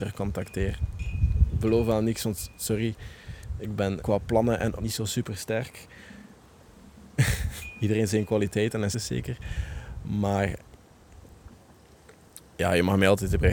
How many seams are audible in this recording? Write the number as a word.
three